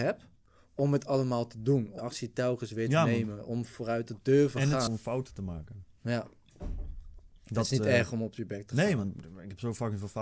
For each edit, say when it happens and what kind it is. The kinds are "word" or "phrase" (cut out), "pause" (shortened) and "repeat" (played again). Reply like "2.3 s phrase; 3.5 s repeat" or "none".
2.0 s word; 4.9 s word